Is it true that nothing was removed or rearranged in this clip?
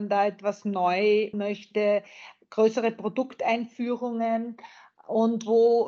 no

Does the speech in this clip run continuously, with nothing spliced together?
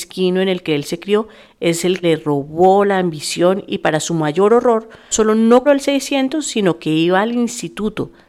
no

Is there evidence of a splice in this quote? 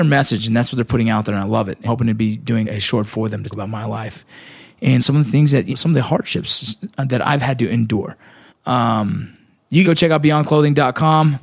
yes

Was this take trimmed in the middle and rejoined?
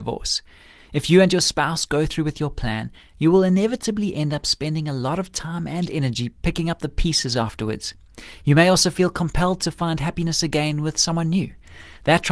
no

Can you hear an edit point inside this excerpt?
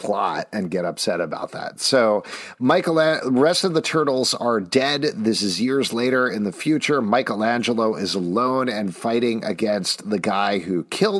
no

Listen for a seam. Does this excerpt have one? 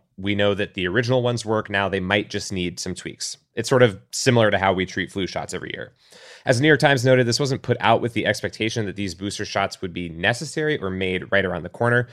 no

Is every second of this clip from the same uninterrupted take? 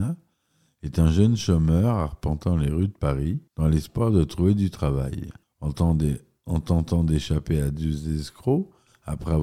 no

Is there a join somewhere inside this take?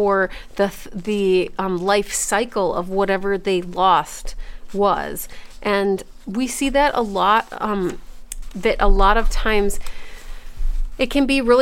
no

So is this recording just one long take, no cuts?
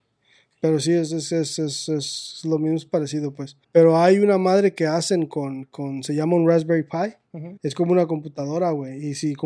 no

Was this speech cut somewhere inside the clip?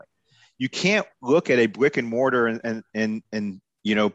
no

